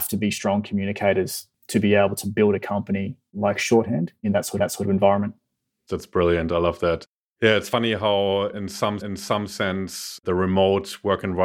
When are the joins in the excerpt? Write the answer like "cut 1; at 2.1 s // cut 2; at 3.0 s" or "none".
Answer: cut 1; at 4.6 s // cut 2; at 9.0 s